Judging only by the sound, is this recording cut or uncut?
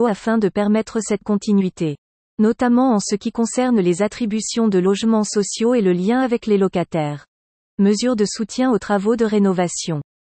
uncut